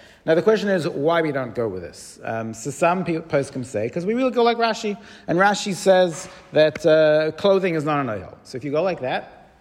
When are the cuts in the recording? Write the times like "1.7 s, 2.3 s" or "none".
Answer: none

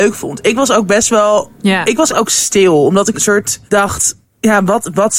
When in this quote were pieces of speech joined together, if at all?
2.1 s, 3.1 s, 3.7 s

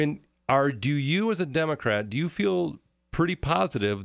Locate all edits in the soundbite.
none

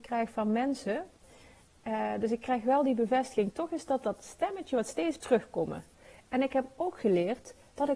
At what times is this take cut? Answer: 5.2 s

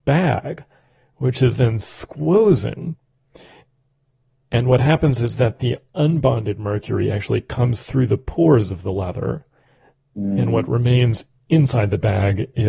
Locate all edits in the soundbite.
none

